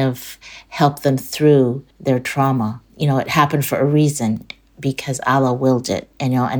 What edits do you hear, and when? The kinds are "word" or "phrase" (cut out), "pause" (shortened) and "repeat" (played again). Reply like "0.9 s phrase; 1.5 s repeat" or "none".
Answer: 1.9 s pause; 2.9 s pause